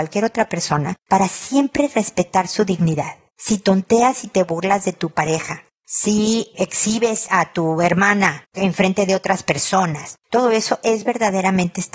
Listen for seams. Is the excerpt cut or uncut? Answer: uncut